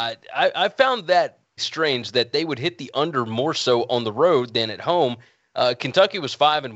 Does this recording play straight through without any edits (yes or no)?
no